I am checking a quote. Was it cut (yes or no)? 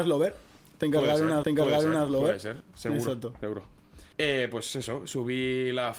yes